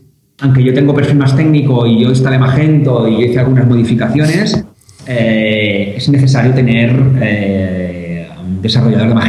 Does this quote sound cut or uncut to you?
uncut